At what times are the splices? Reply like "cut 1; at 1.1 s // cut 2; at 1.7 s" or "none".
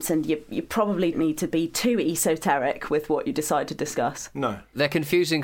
cut 1; at 1.1 s